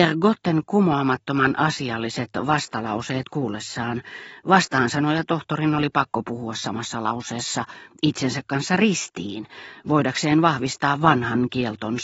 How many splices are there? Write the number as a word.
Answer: zero